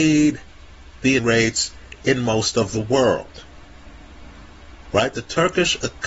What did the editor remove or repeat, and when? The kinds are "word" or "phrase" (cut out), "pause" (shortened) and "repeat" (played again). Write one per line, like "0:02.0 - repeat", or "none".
0:01.2 - word